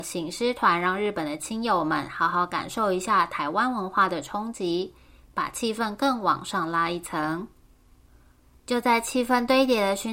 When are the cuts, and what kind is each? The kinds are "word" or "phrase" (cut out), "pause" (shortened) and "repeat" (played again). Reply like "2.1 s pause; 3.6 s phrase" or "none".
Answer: none